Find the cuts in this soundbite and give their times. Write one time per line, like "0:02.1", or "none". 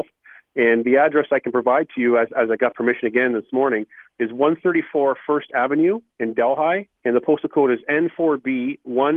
0:06.1
0:07.0